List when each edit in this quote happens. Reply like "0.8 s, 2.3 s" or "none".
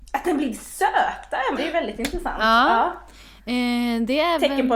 1.6 s